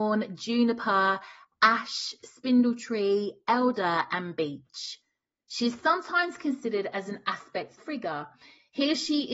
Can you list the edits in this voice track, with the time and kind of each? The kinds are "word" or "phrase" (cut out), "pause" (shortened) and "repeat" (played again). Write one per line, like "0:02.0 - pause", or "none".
0:07.8 - word